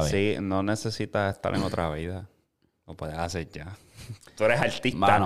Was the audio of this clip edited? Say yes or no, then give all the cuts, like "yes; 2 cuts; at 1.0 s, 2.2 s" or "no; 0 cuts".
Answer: no; 0 cuts